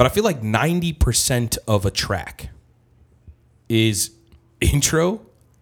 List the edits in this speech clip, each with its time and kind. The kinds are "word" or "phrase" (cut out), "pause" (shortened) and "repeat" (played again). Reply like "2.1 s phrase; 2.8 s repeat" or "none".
none